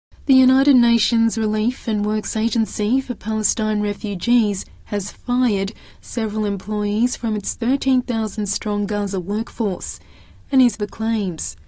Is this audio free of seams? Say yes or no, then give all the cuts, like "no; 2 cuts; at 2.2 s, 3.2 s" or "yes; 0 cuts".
no; 1 cut; at 10.7 s